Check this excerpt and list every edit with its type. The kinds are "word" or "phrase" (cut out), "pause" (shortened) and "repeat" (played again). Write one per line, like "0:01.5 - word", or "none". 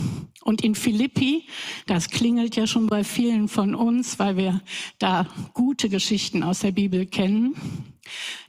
none